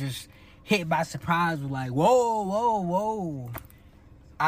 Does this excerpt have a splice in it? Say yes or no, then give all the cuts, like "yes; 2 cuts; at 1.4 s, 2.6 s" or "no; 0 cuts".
no; 0 cuts